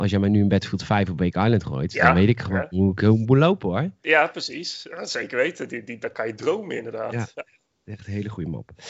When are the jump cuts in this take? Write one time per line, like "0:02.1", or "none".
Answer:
none